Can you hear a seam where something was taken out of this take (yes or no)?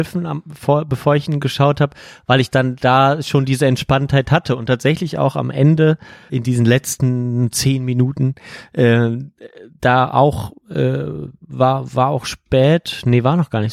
yes